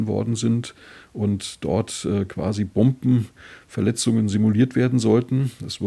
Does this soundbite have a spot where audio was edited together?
no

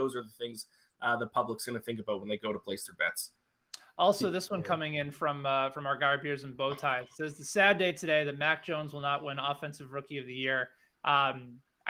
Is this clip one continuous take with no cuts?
yes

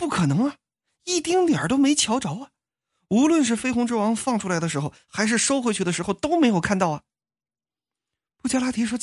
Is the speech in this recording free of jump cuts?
yes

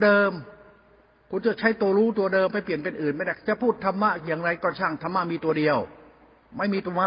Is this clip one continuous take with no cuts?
yes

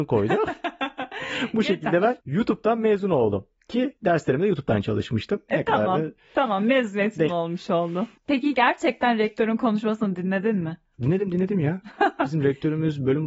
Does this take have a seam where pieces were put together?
yes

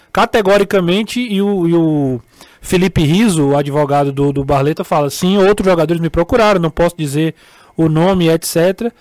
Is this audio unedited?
yes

